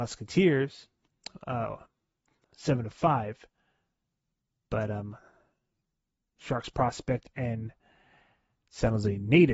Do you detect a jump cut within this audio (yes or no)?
no